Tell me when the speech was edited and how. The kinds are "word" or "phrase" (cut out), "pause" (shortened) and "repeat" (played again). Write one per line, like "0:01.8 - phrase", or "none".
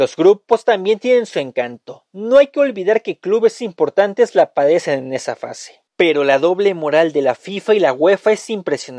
0:05.9 - pause